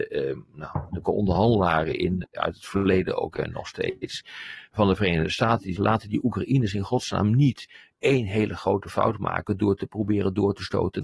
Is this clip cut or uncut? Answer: cut